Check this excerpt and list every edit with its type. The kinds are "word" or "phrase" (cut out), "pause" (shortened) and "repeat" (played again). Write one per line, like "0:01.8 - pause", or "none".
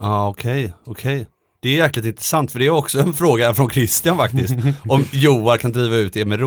none